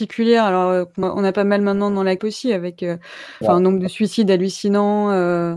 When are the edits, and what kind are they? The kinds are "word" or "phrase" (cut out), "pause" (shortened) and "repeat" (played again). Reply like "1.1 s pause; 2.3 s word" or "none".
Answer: 1.0 s word; 2.2 s word; 3.4 s word